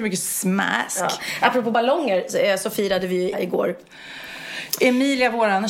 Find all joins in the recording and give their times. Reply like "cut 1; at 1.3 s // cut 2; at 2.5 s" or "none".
cut 1; at 3.3 s